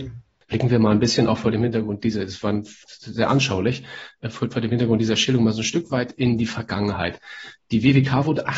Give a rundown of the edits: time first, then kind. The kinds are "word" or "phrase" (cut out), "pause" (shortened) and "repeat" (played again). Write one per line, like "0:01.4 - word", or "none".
0:04.5 - word